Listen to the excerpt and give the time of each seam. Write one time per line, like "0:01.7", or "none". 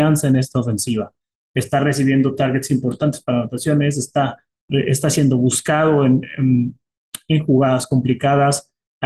none

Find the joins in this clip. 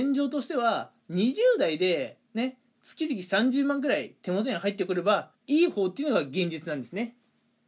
0:02.2
0:05.3

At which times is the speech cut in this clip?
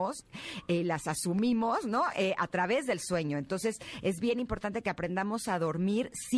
none

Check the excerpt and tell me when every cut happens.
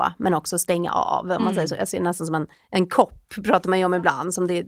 0:02.5

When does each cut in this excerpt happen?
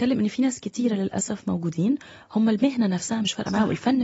none

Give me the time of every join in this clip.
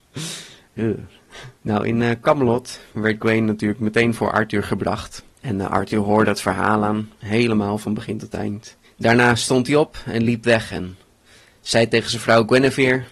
0:01.5
0:05.3
0:07.1
0:08.8

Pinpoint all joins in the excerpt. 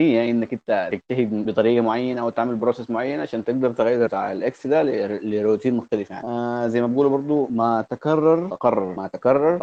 0:04.1

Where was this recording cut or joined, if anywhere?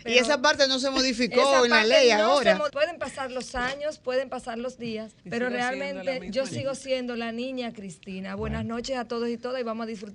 0:02.7
0:05.2

